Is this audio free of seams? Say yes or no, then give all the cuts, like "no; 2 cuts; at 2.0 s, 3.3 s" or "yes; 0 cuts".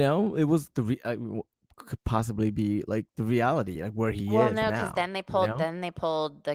yes; 0 cuts